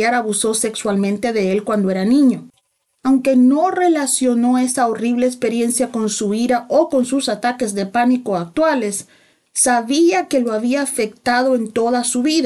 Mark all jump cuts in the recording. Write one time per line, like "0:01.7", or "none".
none